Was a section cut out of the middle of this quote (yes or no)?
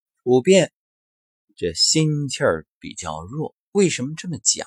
yes